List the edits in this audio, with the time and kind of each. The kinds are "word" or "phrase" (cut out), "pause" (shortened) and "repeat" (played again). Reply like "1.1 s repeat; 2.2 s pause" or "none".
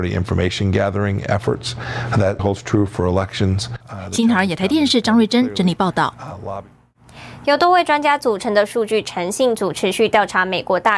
2.4 s word; 3.8 s pause

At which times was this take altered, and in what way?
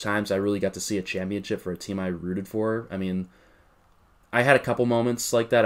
none

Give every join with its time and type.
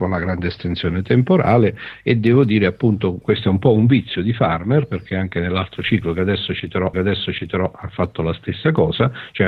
3.2 s word; 6.9 s repeat

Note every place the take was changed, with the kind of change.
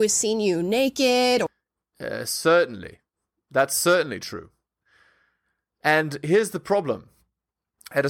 none

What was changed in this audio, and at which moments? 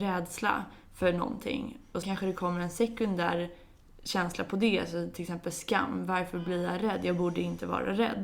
2.0 s word

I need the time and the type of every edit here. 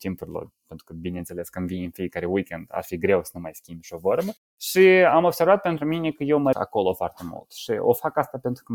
6.5 s word

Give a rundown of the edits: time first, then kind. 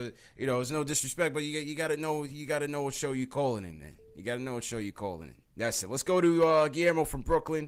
5.5 s pause

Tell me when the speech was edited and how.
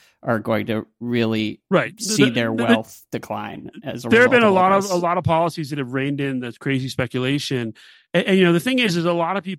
none

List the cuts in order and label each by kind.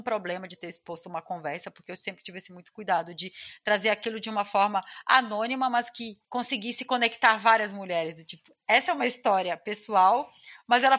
6.2 s pause

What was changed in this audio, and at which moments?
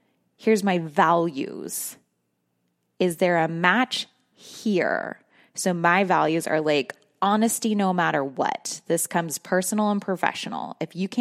none

